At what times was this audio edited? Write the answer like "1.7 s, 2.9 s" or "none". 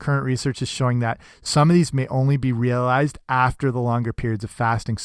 1.9 s